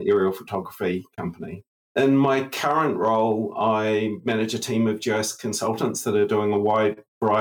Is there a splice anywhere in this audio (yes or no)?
no